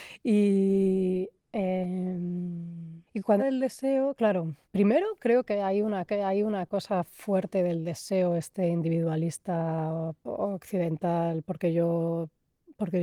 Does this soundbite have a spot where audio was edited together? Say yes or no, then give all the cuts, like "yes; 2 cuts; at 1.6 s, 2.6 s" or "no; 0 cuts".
yes; 4 cuts; at 3.1 s, 3.4 s, 4.6 s, 6.1 s